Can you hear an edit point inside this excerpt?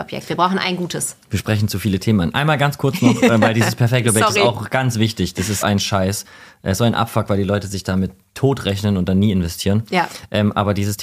yes; 1 cut; at 5.6 s

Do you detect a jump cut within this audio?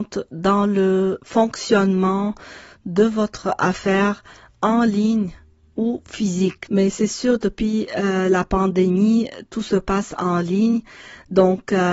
no; 0 cuts

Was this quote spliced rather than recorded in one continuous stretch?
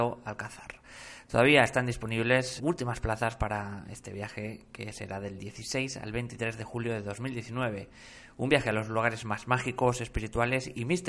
yes; 1 cut; at 2.6 s

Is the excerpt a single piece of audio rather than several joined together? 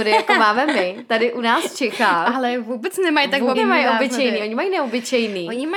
no; 1 cut; at 3.5 s

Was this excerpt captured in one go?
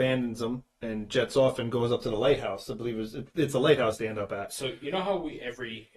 yes; 0 cuts

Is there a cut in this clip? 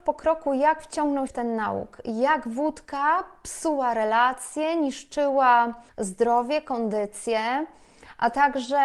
yes; 2 cuts; at 1.3 s, 5.9 s

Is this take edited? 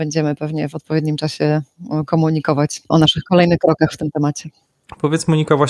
no; 0 cuts

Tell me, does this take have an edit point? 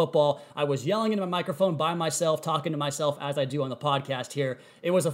no; 0 cuts

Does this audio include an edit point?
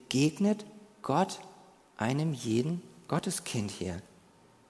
no; 0 cuts

